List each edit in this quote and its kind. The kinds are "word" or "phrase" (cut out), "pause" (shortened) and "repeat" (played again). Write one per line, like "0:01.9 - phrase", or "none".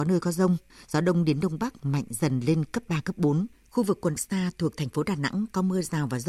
0:03.5 - pause
0:04.2 - phrase